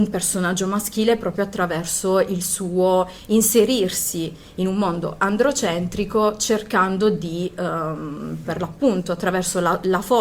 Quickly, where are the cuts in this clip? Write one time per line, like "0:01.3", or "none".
none